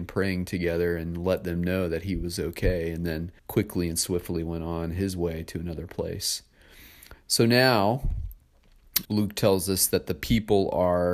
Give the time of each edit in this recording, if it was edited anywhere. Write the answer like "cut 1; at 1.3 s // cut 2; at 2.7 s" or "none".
cut 1; at 3.4 s // cut 2; at 9.0 s